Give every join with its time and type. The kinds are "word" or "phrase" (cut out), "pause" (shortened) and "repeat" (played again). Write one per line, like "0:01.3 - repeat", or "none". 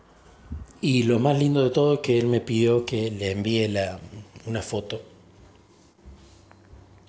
none